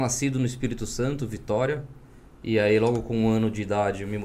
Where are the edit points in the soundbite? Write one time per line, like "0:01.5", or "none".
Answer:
none